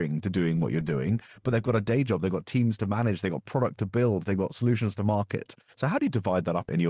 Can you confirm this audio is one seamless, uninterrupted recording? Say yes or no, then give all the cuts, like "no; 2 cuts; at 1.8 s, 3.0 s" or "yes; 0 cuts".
yes; 0 cuts